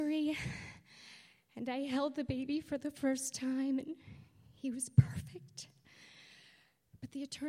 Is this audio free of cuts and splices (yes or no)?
yes